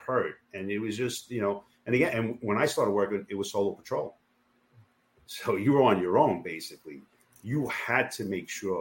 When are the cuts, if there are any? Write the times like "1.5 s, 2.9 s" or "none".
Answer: 2.1 s